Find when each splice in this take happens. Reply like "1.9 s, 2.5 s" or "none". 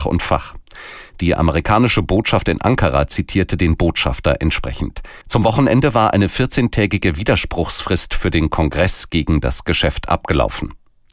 5.2 s